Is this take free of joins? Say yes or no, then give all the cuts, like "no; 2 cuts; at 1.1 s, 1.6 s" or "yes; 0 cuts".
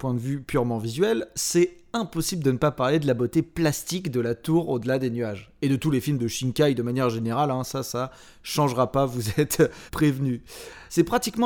yes; 0 cuts